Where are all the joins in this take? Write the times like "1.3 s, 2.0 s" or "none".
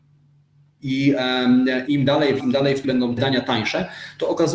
1.9 s, 2.4 s, 2.8 s, 3.2 s